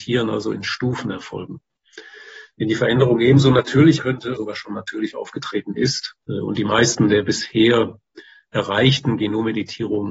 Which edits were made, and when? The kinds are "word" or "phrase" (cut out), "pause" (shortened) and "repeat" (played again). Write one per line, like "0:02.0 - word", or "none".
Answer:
0:04.0 - word
0:04.4 - word
0:06.2 - pause